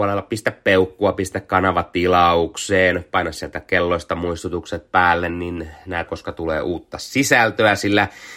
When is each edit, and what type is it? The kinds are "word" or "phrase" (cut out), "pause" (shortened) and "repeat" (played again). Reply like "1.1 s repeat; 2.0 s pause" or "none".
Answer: 6.1 s word